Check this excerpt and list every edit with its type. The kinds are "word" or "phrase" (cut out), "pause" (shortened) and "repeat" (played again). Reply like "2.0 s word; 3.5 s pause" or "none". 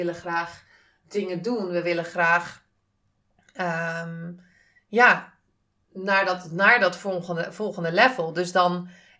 none